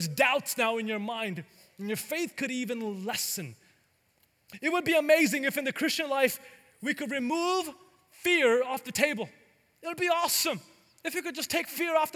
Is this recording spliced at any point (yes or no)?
no